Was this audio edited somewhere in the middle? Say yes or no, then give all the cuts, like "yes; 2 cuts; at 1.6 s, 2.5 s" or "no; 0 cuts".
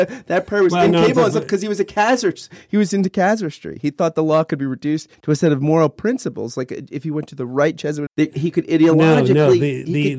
yes; 1 cut; at 8.1 s